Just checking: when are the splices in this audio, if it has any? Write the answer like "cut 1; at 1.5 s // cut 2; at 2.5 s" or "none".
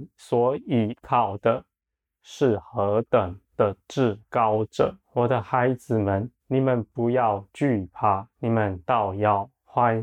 cut 1; at 3.4 s // cut 2; at 5.0 s // cut 3; at 6.4 s // cut 4; at 8.3 s